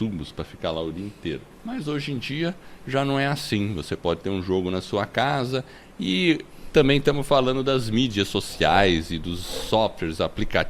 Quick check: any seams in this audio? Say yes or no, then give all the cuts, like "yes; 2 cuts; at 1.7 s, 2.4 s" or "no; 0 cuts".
yes; 1 cut; at 1.5 s